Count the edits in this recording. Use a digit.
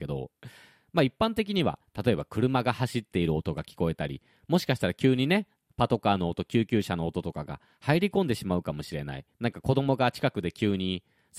1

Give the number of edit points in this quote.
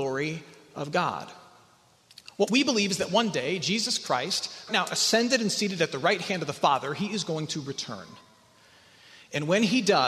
1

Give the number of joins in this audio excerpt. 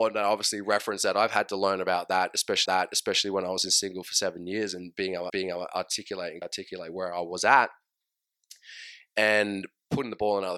3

